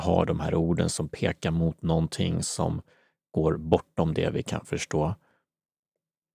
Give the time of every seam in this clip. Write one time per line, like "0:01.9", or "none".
none

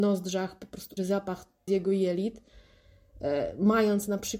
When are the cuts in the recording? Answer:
0:01.0
0:01.7

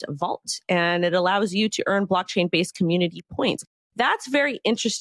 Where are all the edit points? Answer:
none

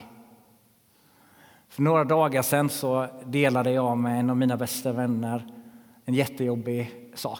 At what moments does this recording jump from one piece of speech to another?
none

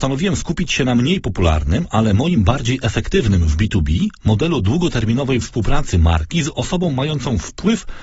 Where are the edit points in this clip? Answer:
0:02.4

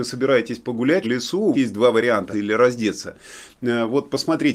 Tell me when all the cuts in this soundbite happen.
0:01.0
0:01.5
0:02.3

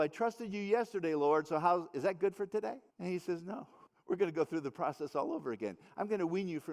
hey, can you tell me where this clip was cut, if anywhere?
0:02.9
0:03.9

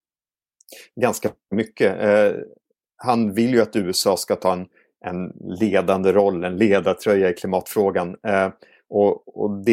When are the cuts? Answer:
none

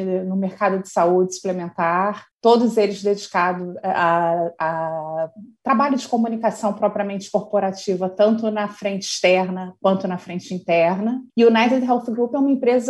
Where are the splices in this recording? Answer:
0:02.3
0:11.3

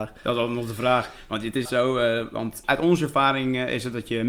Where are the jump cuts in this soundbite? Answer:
0:01.6
0:02.6

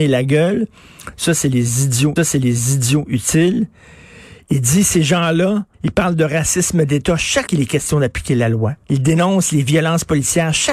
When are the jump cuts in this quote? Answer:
0:02.2
0:05.7
0:07.5
0:08.8

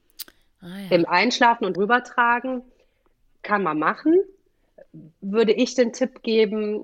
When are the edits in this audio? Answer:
0:01.0
0:01.7

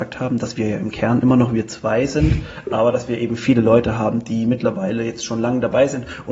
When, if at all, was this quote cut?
none

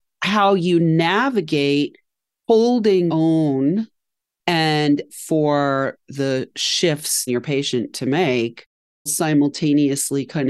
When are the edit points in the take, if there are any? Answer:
0:03.1
0:05.1
0:07.3
0:09.1

